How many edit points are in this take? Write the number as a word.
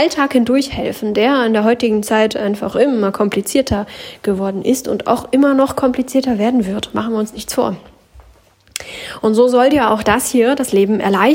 zero